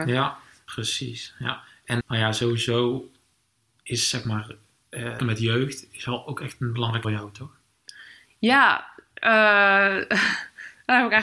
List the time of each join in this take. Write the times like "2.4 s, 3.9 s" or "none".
2.0 s, 5.2 s, 7.0 s